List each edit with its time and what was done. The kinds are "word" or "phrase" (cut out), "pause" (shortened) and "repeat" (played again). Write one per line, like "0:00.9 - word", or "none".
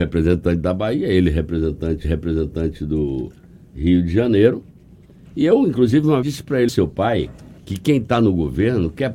0:02.0 - repeat
0:06.2 - word
0:06.7 - phrase
0:07.6 - pause